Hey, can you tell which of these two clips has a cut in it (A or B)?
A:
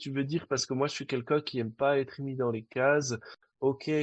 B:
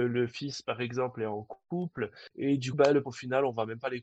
B